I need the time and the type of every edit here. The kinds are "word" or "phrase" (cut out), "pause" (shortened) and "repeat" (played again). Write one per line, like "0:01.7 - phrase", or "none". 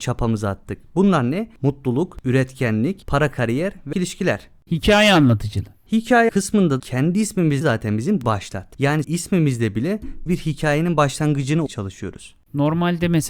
0:03.9 - word
0:06.3 - word
0:06.8 - word
0:07.6 - word
0:08.2 - word
0:09.0 - word
0:10.3 - word
0:11.7 - word